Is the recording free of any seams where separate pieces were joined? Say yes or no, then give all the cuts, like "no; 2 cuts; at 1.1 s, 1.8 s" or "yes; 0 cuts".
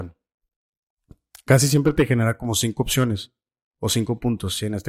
yes; 0 cuts